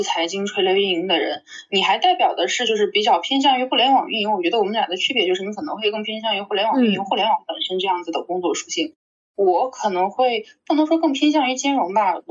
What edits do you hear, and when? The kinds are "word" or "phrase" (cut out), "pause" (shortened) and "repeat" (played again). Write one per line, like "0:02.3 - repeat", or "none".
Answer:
none